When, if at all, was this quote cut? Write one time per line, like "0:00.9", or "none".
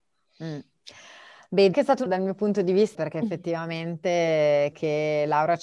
0:01.7
0:02.1
0:02.9
0:04.7